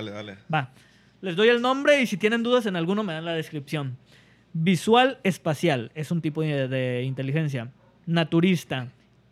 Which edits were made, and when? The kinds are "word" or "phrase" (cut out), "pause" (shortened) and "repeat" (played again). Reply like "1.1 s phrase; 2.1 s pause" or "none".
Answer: none